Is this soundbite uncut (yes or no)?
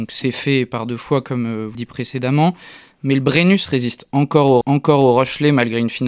no